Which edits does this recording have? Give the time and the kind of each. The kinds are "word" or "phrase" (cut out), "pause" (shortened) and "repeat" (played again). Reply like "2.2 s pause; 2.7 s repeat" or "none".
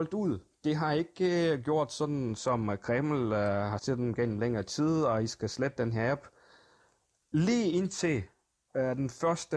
3.8 s word

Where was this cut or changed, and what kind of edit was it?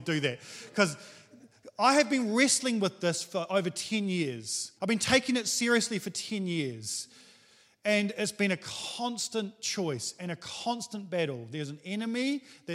4.8 s pause

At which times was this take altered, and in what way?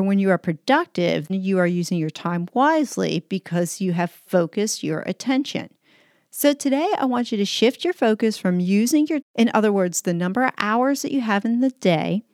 1.3 s word; 9.2 s word

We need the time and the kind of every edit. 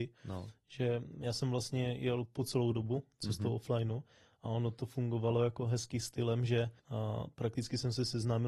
6.8 s pause

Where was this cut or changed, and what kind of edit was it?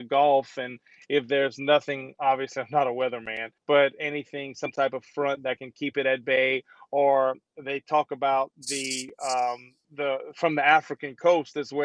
3.6 s pause

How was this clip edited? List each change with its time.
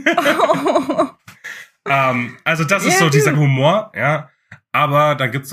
3.3 s word

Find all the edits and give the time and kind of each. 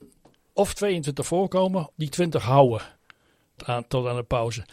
1.9 s word; 3.6 s word

